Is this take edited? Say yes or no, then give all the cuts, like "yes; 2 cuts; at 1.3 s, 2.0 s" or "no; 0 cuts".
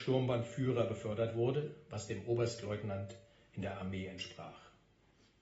no; 0 cuts